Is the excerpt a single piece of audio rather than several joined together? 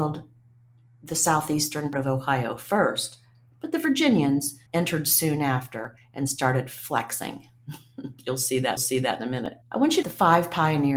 no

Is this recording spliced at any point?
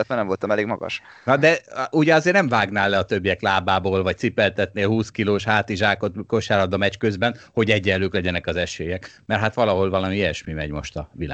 no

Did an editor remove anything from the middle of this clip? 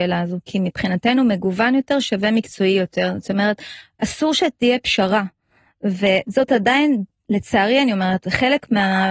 no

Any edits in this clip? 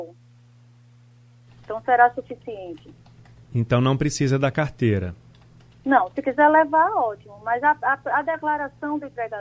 no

